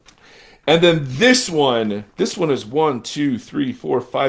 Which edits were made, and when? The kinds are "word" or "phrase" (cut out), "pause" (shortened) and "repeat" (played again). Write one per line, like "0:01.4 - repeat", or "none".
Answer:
0:02.1 - pause